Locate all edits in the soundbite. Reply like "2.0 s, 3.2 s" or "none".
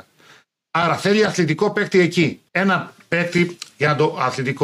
2.5 s